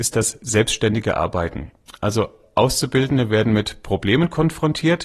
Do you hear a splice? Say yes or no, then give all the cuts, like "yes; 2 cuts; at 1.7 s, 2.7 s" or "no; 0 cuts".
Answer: no; 0 cuts